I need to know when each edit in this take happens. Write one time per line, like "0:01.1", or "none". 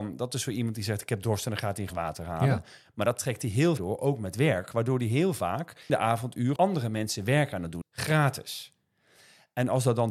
0:01.9
0:03.8
0:05.9
0:06.6
0:07.8